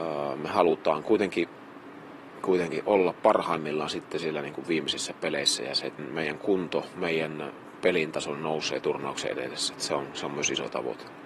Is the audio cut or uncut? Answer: cut